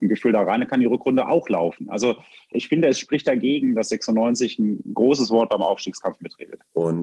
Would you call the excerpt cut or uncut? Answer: cut